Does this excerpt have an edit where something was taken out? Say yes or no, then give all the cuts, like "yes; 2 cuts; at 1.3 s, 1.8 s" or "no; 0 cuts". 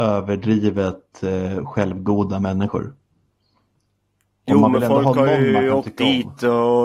no; 0 cuts